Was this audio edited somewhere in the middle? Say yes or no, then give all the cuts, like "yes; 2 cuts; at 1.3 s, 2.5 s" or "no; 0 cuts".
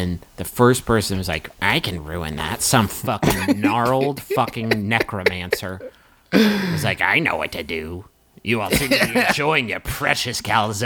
no; 0 cuts